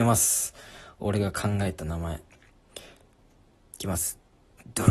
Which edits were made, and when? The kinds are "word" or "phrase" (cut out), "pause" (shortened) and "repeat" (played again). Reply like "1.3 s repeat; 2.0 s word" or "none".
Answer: none